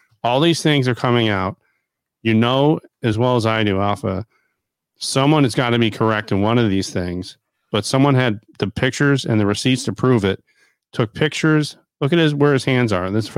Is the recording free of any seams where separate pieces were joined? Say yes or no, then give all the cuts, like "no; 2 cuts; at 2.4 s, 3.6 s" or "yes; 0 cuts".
yes; 0 cuts